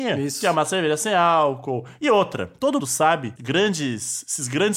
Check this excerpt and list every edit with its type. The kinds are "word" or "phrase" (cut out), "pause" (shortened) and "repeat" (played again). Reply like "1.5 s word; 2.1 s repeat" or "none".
2.8 s word; 3.4 s phrase

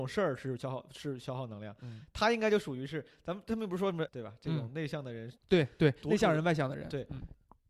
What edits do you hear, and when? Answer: 4.1 s word; 5.4 s pause

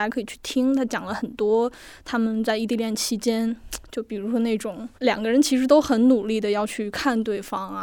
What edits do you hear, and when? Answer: 4.9 s pause

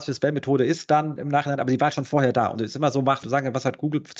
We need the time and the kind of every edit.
3.2 s word

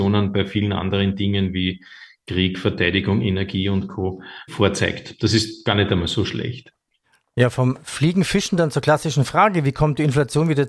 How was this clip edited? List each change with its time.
none

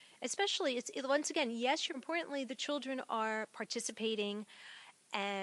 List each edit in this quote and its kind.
1.9 s phrase

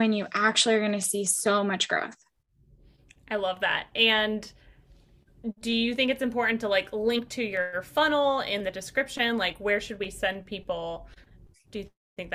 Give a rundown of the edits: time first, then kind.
none

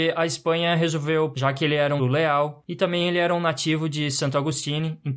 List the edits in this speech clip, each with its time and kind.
1.3 s word; 2.0 s word

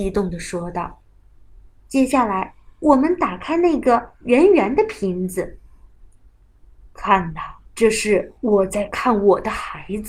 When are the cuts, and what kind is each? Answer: 1.0 s pause; 7.7 s pause; 8.4 s pause

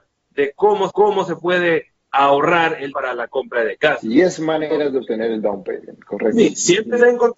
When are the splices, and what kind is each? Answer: 0.9 s repeat; 2.9 s word

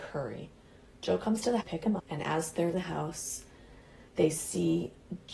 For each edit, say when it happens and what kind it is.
1.6 s phrase; 2.0 s word; 2.7 s word; 4.1 s pause

